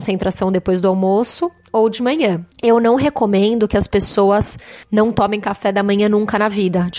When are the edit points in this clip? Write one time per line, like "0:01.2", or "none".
0:02.5
0:04.8